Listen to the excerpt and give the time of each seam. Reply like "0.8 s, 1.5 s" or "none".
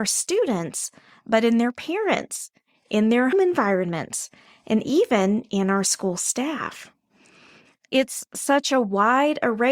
3.3 s